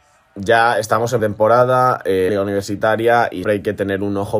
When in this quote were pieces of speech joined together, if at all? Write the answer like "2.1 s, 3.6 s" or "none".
1.2 s, 2.3 s, 3.4 s